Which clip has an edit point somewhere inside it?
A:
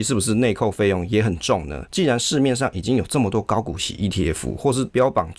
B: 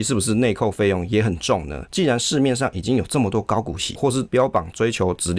B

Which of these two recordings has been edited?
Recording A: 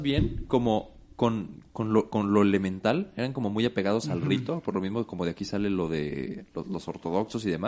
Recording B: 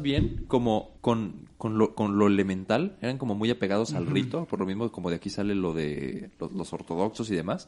B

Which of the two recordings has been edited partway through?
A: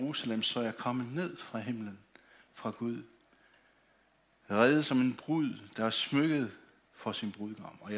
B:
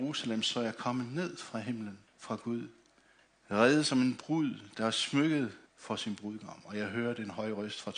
B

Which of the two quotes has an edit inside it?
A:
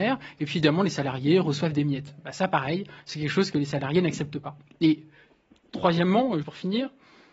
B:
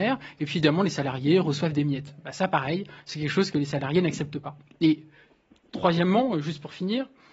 A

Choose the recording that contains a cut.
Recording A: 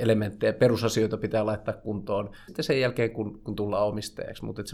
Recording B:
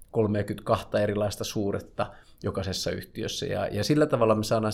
A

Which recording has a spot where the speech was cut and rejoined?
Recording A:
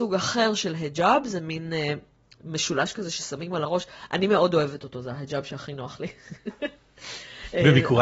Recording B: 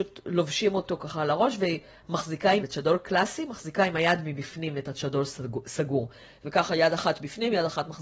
B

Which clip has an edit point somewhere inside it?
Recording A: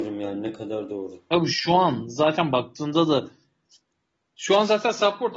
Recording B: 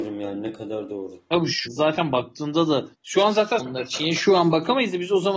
B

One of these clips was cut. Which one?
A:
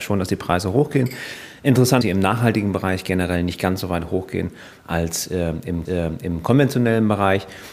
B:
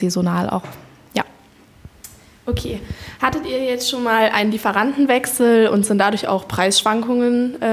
A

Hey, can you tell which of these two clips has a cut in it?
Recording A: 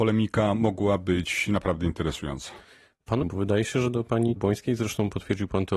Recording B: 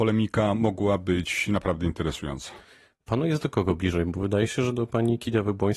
A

